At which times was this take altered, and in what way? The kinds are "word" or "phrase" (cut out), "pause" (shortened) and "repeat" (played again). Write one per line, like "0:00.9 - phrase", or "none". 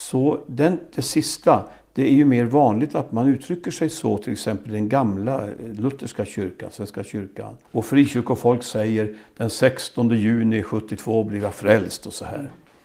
0:07.6 - pause